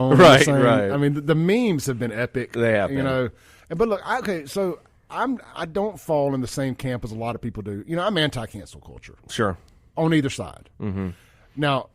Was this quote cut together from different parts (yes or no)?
no